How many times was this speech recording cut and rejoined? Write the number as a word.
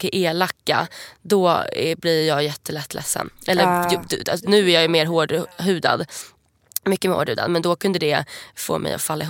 zero